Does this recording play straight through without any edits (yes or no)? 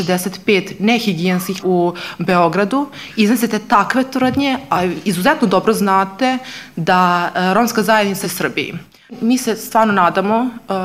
no